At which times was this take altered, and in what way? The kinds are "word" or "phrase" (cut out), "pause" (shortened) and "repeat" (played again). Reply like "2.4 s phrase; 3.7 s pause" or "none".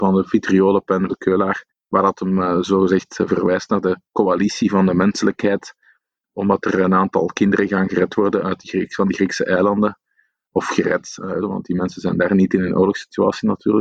1.1 s phrase; 1.7 s pause; 11.4 s phrase